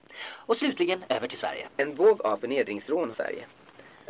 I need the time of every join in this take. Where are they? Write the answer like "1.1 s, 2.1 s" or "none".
1.7 s, 3.1 s